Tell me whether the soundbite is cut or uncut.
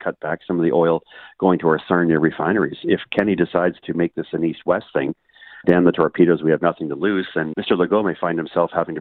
cut